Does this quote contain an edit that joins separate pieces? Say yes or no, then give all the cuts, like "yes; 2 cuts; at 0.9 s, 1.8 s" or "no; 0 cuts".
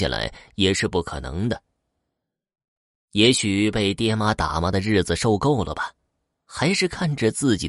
no; 0 cuts